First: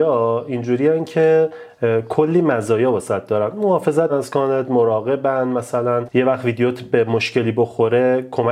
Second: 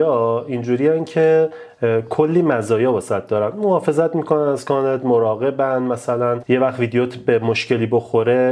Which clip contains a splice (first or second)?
first